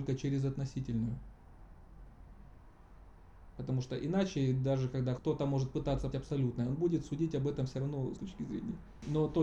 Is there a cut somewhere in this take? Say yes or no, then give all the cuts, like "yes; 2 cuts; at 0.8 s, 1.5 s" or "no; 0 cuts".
yes; 3 cuts; at 5.2 s, 6.1 s, 8.2 s